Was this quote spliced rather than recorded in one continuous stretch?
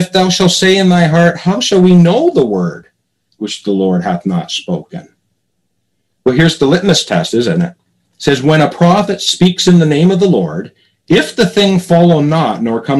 no; 0 cuts

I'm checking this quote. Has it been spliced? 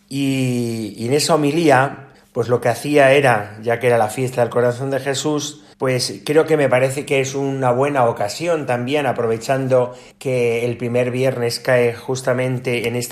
yes; 3 cuts; at 2.1 s, 5.7 s, 10.1 s

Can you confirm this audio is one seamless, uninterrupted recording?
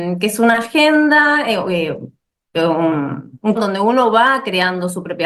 no; 1 cut; at 3.6 s

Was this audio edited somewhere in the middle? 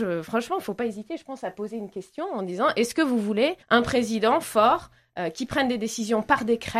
yes; 1 cut; at 3.6 s

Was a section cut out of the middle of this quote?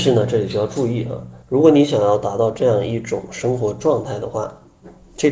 yes; 1 cut; at 1.4 s

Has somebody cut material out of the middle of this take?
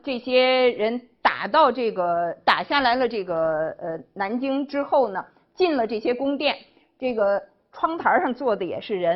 no; 0 cuts

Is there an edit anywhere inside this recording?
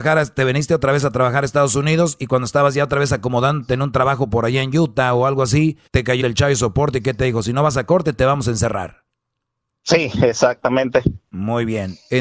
yes; 2 cuts; at 5.9 s, 6.2 s

